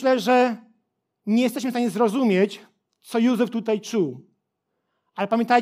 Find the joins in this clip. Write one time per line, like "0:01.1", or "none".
none